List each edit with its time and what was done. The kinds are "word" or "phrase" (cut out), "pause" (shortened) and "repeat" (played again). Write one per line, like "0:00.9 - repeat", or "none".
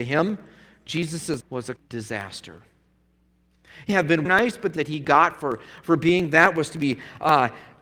0:01.4 - word
0:01.8 - word
0:03.9 - word
0:04.3 - phrase
0:04.8 - phrase